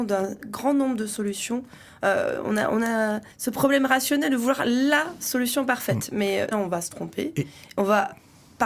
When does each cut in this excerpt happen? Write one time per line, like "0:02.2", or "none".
0:03.3
0:06.5